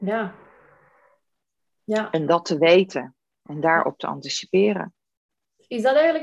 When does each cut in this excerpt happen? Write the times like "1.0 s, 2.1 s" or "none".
none